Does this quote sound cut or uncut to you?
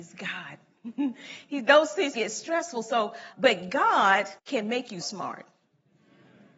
cut